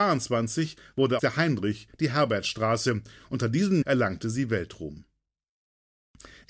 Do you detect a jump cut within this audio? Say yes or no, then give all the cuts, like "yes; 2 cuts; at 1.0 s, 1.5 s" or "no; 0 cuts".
yes; 2 cuts; at 1.2 s, 3.8 s